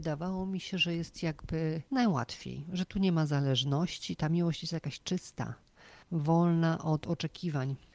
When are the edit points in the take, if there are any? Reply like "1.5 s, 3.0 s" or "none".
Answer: 1.9 s, 6.0 s